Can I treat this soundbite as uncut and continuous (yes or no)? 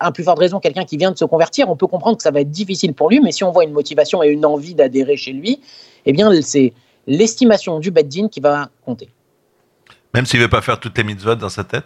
yes